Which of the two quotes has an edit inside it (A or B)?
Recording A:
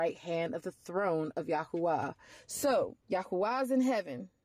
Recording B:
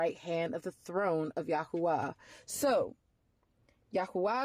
A